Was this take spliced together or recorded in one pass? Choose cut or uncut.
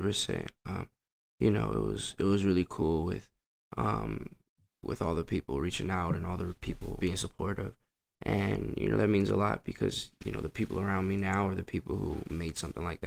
cut